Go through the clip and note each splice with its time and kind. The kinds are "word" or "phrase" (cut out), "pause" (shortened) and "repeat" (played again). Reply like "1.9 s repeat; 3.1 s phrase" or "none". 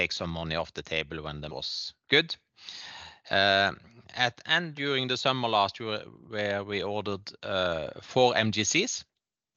1.5 s word; 4.4 s word; 4.7 s word